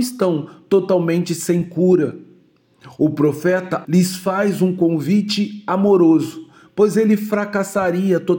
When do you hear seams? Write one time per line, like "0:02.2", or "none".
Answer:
0:03.8